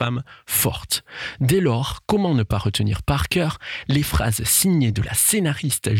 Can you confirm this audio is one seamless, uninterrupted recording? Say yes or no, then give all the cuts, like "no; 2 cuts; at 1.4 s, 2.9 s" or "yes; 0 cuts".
yes; 0 cuts